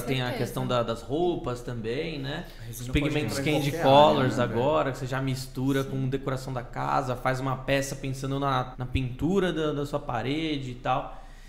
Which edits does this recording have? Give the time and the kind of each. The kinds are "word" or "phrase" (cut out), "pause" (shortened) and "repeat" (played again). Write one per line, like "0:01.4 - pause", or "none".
0:08.7 - word

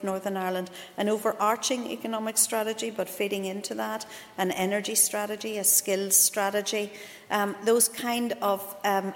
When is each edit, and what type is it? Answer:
none

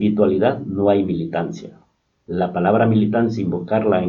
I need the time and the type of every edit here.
none

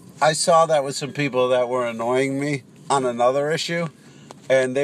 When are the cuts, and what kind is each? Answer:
0:02.8 - pause

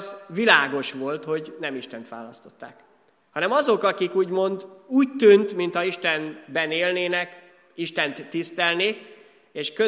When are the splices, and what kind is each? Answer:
none

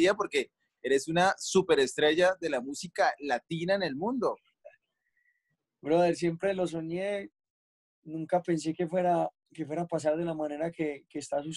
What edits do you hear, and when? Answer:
none

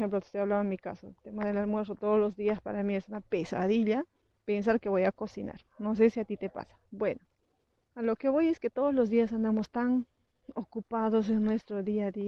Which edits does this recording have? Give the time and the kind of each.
0:03.3 - pause
0:06.9 - pause

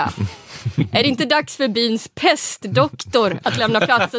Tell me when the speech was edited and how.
none

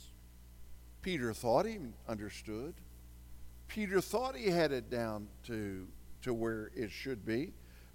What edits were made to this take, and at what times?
0:01.0 - pause

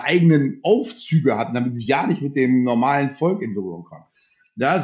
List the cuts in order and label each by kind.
none

